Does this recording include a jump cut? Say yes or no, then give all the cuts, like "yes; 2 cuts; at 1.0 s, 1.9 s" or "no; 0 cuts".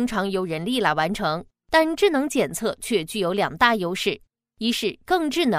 no; 0 cuts